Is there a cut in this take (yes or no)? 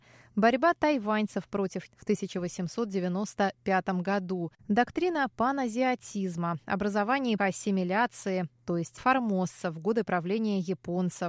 yes